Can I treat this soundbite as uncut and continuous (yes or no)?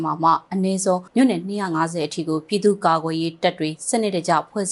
no